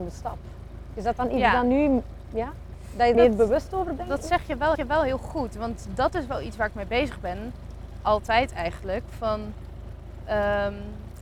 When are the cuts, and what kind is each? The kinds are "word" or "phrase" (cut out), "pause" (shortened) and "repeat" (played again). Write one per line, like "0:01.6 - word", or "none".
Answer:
0:03.1 - phrase
0:04.7 - repeat